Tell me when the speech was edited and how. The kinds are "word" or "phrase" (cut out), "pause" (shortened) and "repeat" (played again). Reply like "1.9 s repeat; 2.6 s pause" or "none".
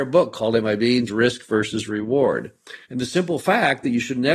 1.1 s phrase; 2.8 s pause